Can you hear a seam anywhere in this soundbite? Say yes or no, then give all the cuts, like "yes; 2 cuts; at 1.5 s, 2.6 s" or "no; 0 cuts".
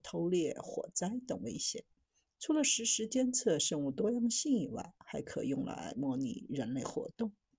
no; 0 cuts